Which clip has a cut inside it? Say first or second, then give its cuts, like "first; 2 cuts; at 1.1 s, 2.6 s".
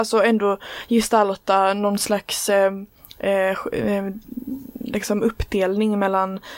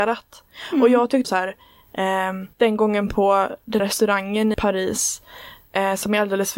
second; 4 cuts; at 1.2 s, 2.5 s, 3.8 s, 4.5 s